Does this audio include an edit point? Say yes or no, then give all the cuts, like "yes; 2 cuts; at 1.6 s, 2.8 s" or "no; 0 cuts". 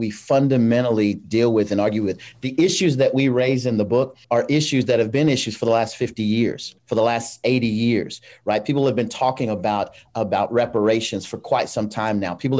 yes; 2 cuts; at 4.2 s, 6.8 s